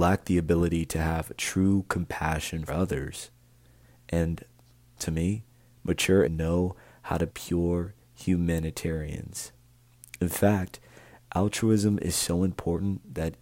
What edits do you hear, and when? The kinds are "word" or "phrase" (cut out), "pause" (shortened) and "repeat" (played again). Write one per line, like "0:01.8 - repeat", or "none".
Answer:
0:02.7 - word
0:06.2 - word
0:07.3 - word